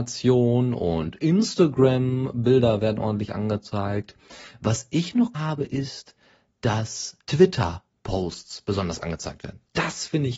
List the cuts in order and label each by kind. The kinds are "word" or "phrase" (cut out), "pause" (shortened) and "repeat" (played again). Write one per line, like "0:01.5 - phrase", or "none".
0:05.3 - word
0:07.2 - pause